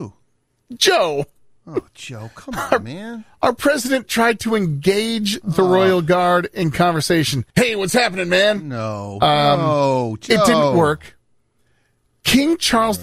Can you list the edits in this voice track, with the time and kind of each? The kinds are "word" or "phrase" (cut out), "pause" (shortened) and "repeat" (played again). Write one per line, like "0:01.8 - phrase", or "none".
0:07.5 - pause